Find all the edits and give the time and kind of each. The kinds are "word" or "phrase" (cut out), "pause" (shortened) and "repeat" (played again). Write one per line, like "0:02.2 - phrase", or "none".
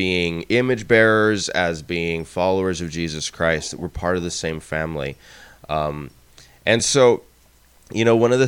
none